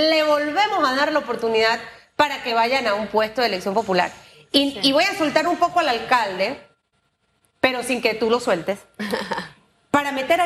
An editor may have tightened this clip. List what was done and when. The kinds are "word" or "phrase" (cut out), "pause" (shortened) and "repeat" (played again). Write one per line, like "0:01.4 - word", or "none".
none